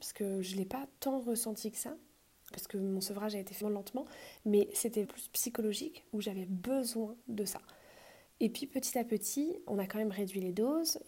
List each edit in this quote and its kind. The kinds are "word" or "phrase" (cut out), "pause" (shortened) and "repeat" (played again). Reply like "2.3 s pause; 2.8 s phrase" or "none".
2.5 s word; 3.6 s word; 5.0 s word; 7.2 s pause; 8.3 s pause; 9.7 s word